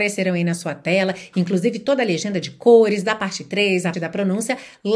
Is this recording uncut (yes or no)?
no